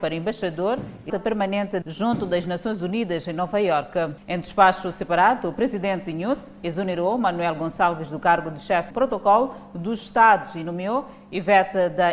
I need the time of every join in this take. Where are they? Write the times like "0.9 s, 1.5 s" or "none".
1.1 s, 1.8 s, 8.9 s